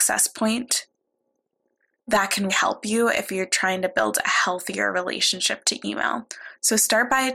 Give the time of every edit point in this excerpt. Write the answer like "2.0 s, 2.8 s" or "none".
2.5 s